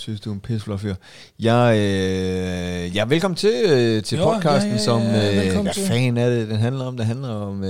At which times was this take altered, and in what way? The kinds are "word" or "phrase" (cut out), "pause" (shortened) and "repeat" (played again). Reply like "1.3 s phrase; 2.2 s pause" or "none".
none